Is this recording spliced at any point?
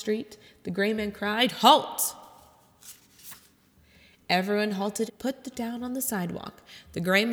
yes; 2 cuts; at 5.1 s, 5.5 s

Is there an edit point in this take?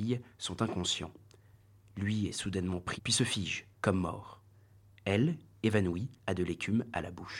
yes; 3 cuts; at 3.0 s, 3.7 s, 6.2 s

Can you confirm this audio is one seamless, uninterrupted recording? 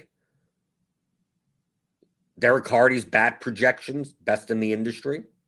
yes; 0 cuts

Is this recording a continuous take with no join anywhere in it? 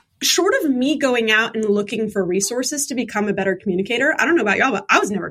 yes; 0 cuts

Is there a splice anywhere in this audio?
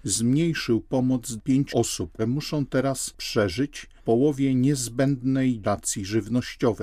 yes; 5 cuts; at 1.4 s, 1.7 s, 2.2 s, 4.0 s, 5.6 s

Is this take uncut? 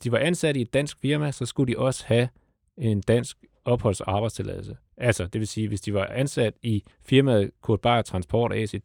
no; 1 cut; at 6.9 s

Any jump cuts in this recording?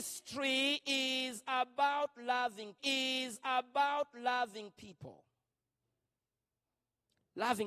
yes; 1 cut; at 2.8 s

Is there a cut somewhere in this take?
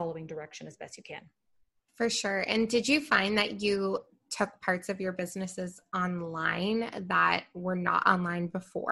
no; 0 cuts

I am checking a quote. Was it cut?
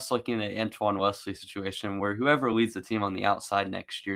no; 0 cuts

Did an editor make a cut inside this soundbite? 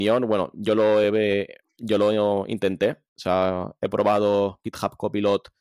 no; 0 cuts

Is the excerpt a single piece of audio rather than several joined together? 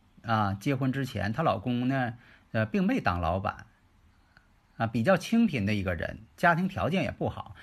yes; 0 cuts

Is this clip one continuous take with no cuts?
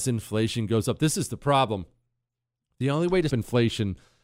no; 1 cut; at 3.3 s

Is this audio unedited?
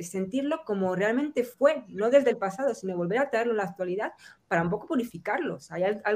yes; 0 cuts

